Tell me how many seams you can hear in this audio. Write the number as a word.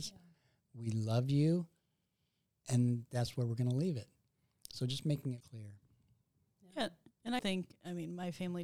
two